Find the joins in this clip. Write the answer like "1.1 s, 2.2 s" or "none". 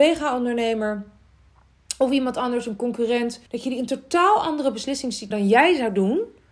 3.5 s, 5.3 s